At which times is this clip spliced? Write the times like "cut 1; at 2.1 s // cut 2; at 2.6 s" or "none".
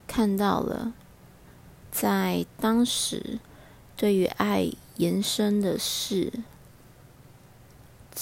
none